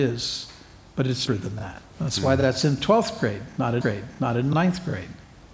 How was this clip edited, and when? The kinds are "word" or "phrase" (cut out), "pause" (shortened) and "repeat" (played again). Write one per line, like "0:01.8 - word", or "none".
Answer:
0:01.3 - phrase
0:01.9 - pause
0:03.8 - repeat